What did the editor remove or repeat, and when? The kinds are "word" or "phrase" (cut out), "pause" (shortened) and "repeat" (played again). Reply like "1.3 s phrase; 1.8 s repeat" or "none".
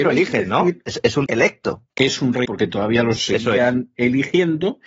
1.3 s word; 1.9 s pause; 2.5 s word; 3.2 s word